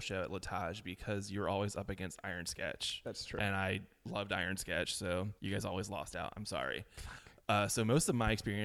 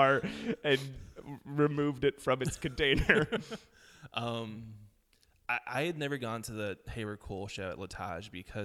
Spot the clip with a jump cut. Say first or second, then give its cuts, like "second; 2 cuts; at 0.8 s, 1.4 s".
first; 1 cut; at 5.4 s